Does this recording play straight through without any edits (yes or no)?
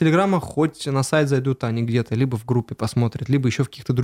yes